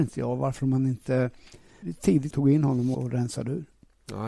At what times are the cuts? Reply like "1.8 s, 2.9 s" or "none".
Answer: 1.8 s, 2.3 s, 2.9 s